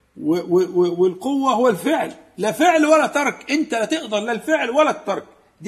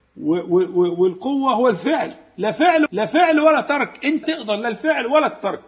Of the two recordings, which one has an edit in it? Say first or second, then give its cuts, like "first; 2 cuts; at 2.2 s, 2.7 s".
second; 2 cuts; at 2.9 s, 4.2 s